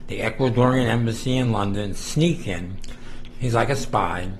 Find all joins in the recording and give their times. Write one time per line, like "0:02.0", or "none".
none